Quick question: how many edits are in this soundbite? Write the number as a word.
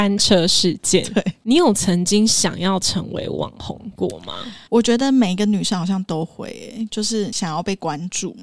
one